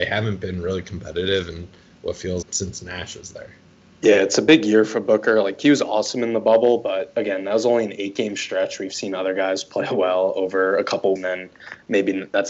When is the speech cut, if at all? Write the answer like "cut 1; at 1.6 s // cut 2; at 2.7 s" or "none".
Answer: cut 1; at 2.4 s // cut 2; at 11.2 s